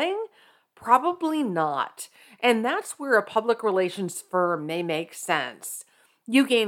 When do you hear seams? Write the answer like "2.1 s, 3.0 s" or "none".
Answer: none